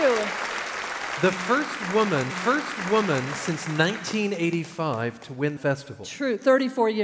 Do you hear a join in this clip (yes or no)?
yes